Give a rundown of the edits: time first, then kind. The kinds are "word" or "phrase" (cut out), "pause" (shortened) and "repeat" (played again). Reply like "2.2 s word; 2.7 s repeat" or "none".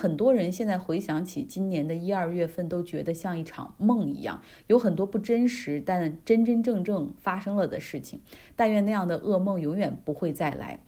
none